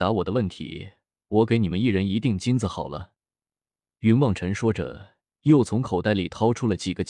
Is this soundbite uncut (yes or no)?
yes